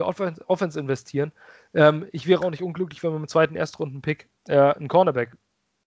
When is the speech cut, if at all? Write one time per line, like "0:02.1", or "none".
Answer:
0:04.4